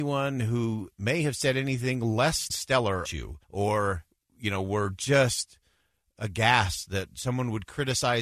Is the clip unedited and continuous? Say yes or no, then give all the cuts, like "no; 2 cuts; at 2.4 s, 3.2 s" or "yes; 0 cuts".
no; 3 cuts; at 2.5 s, 3.0 s, 3.4 s